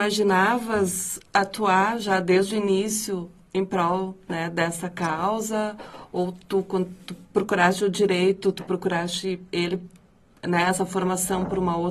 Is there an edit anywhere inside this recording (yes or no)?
yes